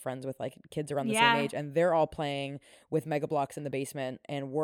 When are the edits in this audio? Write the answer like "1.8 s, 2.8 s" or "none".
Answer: none

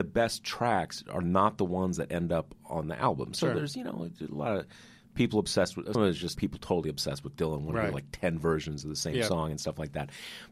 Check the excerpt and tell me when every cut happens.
5.9 s, 6.3 s

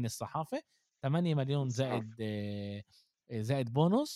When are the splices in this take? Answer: none

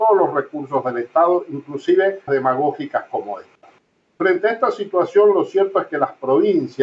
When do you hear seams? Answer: 2.3 s

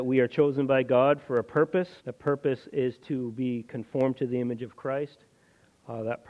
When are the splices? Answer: 2.0 s

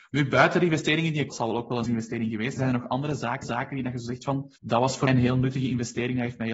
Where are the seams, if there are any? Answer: 1.3 s, 1.9 s, 2.6 s, 3.4 s, 4.6 s, 5.1 s

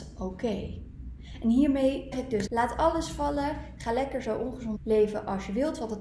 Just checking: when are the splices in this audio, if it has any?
2.1 s, 2.5 s, 4.8 s

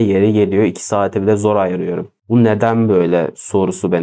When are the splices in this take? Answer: none

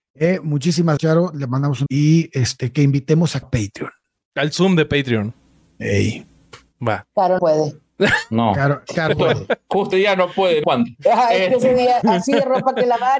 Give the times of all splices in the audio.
1.0 s, 1.9 s, 3.4 s, 7.4 s, 9.1 s, 9.9 s, 10.6 s, 12.0 s

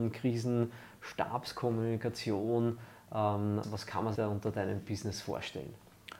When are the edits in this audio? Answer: 3.6 s, 4.1 s, 4.8 s

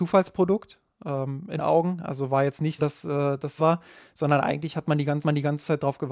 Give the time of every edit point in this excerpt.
1.6 s, 2.8 s, 3.6 s, 5.2 s

